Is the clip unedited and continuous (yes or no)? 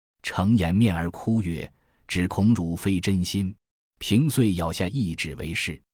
no